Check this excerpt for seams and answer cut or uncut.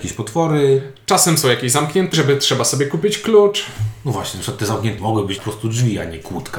cut